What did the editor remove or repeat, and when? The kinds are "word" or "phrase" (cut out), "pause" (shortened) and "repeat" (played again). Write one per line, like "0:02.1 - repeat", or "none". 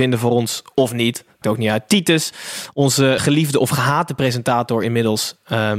0:01.4 - word
0:03.2 - word